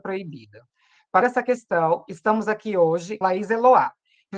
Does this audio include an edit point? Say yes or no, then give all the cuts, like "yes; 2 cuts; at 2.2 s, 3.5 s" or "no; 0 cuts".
yes; 2 cuts; at 1.2 s, 3.2 s